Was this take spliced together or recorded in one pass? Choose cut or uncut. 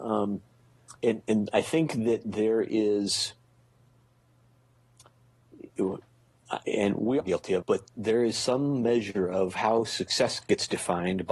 cut